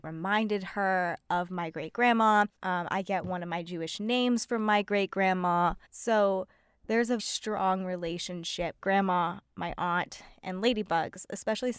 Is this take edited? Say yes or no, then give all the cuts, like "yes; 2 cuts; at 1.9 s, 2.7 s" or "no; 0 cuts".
yes; 4 cuts; at 2.6 s, 5.9 s, 7.2 s, 8.8 s